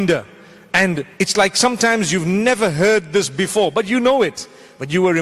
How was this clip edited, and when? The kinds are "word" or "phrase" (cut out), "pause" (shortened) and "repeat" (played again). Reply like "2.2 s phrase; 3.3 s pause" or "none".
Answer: 1.1 s pause